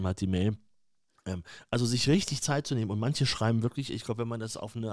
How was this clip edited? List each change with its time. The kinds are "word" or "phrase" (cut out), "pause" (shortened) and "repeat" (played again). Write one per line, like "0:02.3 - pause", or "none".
none